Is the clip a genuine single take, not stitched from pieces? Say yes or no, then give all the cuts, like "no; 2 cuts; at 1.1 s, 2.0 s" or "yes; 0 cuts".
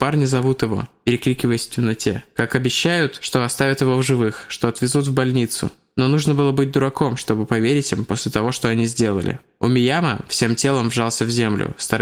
yes; 0 cuts